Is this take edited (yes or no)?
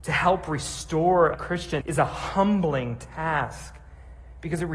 yes